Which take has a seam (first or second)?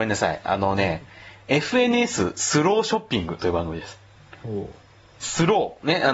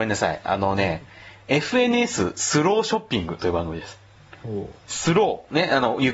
second